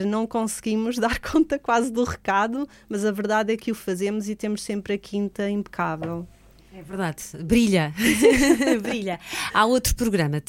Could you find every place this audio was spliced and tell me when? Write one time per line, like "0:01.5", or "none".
none